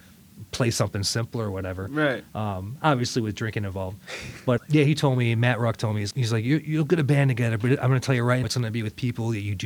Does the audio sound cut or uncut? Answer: cut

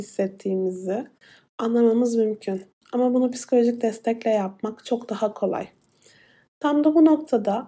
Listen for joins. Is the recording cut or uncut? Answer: uncut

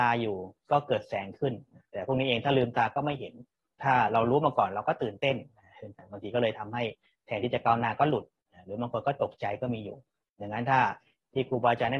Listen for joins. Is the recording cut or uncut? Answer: uncut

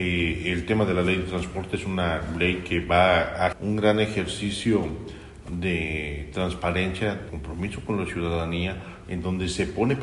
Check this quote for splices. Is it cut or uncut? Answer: cut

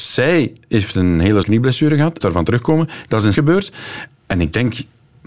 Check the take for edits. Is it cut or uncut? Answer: cut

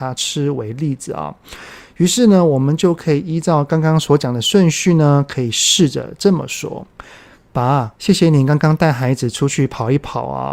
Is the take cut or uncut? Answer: cut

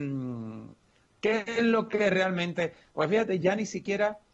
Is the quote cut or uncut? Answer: uncut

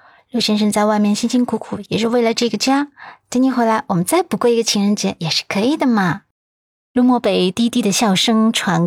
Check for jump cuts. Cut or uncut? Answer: cut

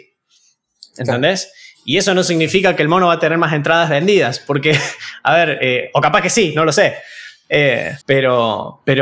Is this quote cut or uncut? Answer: cut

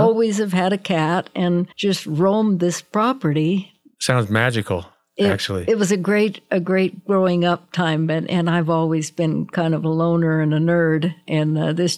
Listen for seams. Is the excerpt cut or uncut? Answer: cut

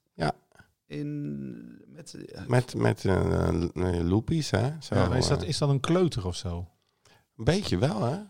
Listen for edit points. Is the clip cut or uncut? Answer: uncut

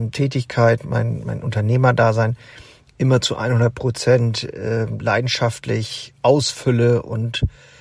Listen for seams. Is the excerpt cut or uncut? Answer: uncut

